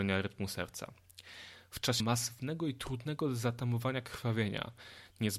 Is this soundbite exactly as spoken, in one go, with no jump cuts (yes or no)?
no